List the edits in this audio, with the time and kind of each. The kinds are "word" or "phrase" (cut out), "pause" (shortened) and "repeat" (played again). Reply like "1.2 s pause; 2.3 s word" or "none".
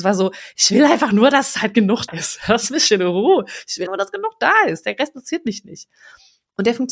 2.1 s word; 3.9 s word